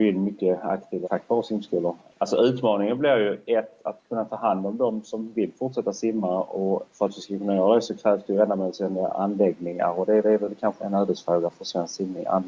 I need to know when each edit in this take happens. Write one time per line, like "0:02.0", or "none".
0:01.0
0:10.2
0:10.8